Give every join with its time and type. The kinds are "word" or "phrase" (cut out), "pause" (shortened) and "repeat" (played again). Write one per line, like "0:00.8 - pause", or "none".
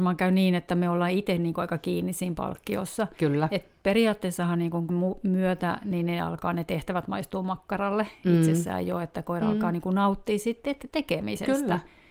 0:04.9 - word